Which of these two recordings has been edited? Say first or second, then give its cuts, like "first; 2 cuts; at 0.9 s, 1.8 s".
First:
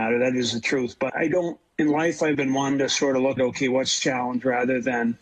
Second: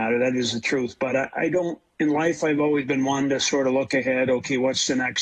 first; 4 cuts; at 1.1 s, 2.3 s, 3.4 s, 4.0 s